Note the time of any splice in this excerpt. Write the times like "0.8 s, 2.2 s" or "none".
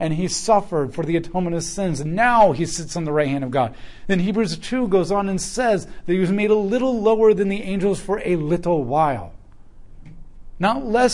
none